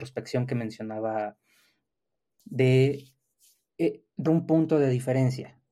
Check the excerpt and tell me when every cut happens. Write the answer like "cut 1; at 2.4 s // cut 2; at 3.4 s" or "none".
cut 1; at 2.4 s // cut 2; at 4.3 s